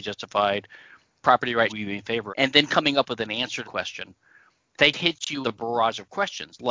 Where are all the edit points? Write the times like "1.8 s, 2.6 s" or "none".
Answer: 1.2 s, 1.7 s, 2.3 s, 3.6 s, 4.9 s, 5.4 s

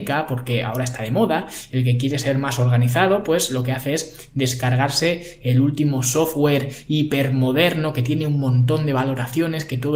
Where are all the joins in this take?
none

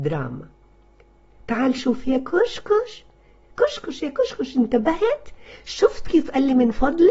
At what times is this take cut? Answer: none

